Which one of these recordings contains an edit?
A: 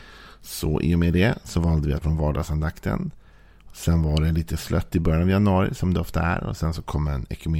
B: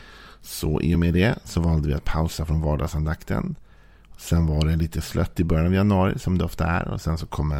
A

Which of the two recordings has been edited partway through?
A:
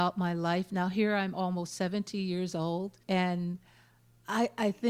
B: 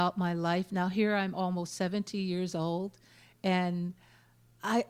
A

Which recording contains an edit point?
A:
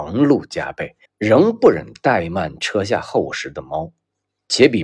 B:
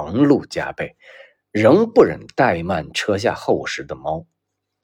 A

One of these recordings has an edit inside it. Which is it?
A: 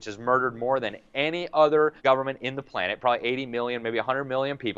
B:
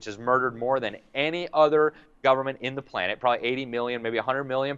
A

